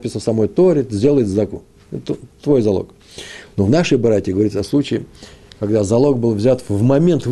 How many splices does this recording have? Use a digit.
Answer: 0